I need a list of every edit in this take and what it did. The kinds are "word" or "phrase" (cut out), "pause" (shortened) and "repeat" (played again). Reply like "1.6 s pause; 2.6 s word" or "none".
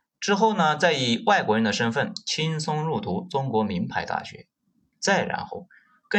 none